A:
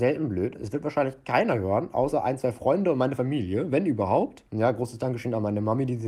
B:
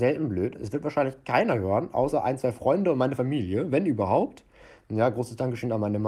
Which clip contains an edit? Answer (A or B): A